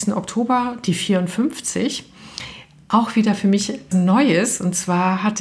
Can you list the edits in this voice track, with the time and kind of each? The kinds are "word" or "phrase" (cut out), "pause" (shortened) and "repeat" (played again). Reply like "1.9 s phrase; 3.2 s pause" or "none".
3.9 s word